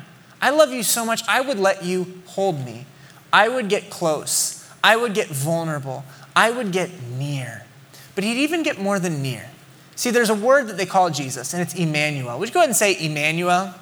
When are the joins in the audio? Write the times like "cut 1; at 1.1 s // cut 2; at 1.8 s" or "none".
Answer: none